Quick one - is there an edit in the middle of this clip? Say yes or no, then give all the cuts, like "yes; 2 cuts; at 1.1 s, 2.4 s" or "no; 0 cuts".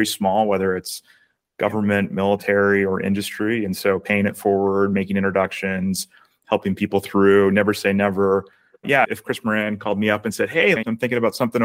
no; 0 cuts